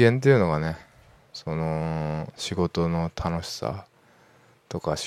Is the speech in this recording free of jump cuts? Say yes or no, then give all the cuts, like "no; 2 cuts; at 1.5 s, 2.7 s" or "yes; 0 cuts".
yes; 0 cuts